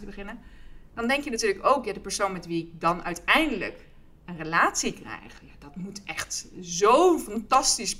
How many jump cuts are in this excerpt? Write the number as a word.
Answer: zero